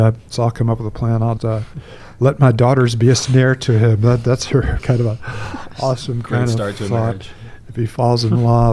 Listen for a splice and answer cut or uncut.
cut